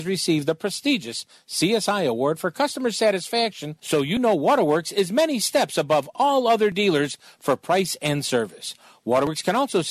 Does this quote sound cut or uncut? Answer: uncut